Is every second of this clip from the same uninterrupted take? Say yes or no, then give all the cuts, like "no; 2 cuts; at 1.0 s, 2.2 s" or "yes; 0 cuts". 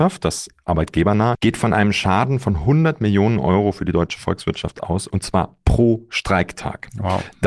no; 1 cut; at 1.3 s